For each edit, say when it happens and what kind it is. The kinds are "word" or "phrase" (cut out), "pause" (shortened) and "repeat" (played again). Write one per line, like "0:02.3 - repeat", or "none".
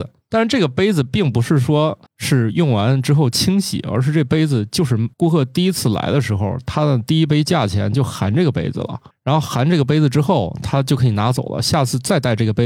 0:02.1 - pause
0:05.1 - pause
0:09.1 - pause